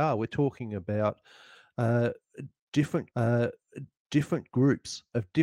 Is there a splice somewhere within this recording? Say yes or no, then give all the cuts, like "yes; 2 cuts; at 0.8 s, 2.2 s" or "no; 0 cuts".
yes; 1 cut; at 3.1 s